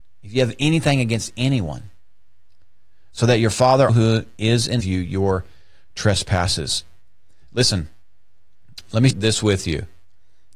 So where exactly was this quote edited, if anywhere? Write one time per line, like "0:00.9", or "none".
0:03.9
0:04.8
0:09.1